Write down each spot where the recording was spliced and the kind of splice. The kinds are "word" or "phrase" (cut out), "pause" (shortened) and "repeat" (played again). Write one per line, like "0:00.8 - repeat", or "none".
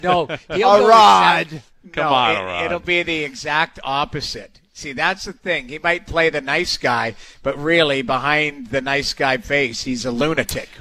none